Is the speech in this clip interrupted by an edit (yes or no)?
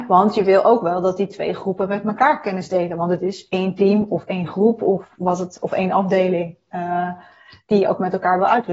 no